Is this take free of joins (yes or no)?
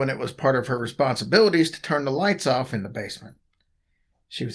yes